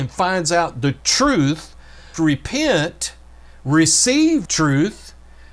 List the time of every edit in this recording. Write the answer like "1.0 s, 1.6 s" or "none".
2.1 s, 4.5 s